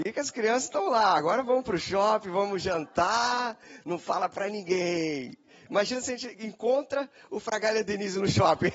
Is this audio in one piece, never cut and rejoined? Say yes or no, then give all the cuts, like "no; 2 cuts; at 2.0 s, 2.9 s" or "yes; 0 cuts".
yes; 0 cuts